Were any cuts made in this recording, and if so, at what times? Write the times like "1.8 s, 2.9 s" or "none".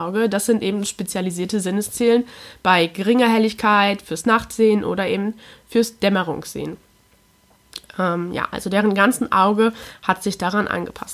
none